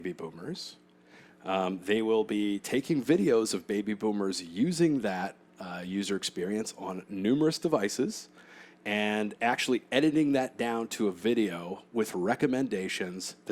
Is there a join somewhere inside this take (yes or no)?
no